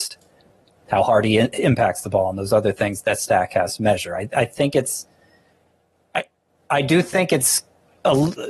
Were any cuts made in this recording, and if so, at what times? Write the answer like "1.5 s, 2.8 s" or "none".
none